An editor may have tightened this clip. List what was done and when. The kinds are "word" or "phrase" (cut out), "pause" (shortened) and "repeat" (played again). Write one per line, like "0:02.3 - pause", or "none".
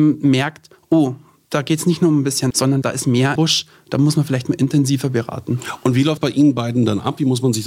0:02.5 - word
0:03.4 - word
0:06.2 - word

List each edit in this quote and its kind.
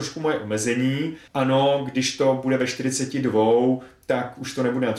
0:01.3 - pause

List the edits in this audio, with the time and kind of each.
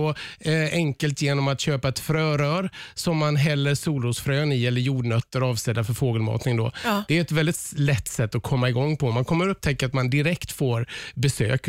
none

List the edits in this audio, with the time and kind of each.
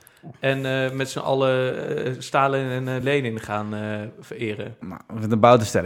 none

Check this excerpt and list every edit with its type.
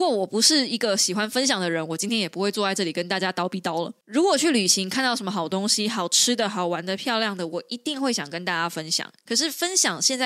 none

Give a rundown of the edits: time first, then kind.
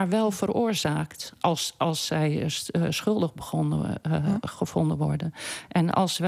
none

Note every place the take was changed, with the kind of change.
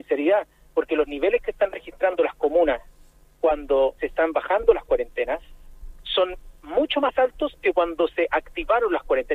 0:04.0 - word

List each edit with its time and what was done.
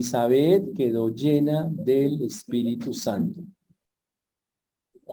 none

